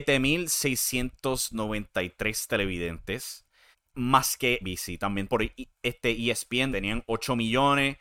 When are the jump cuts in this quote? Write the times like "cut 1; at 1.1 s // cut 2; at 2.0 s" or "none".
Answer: cut 1; at 3.7 s // cut 2; at 4.6 s // cut 3; at 5.3 s // cut 4; at 6.7 s